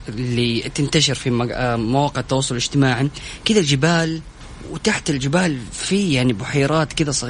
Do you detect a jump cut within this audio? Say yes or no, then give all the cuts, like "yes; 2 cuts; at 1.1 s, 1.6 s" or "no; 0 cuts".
no; 0 cuts